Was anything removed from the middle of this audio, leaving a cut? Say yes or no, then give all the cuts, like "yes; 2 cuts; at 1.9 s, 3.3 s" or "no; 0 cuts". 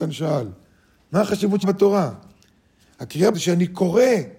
yes; 2 cuts; at 1.6 s, 3.3 s